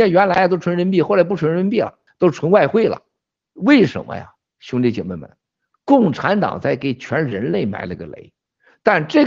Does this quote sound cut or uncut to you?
uncut